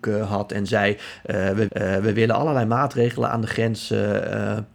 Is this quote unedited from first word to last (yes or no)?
no